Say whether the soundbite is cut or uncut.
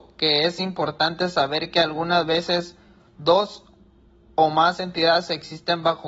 uncut